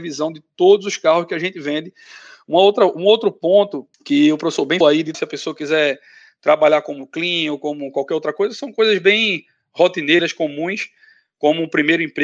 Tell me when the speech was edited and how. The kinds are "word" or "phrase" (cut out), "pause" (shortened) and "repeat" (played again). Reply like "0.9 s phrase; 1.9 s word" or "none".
3.9 s pause; 4.8 s word; 5.1 s word